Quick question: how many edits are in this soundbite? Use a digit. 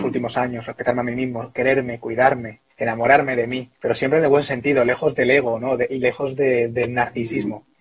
2